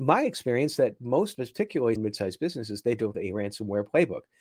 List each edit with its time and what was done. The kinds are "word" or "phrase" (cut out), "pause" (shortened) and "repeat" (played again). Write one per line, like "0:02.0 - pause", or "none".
0:01.3 - word
0:02.0 - word
0:03.1 - word